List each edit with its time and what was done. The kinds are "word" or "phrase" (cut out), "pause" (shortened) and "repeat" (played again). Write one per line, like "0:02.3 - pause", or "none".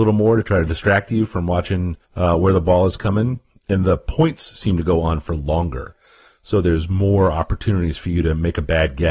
0:02.0 - pause